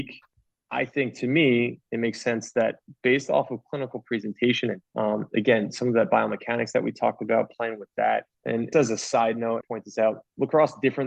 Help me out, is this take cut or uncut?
cut